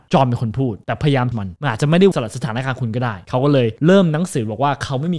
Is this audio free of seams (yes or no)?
no